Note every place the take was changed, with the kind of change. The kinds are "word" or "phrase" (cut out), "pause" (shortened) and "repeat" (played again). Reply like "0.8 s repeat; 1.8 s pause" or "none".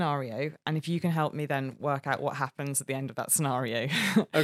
none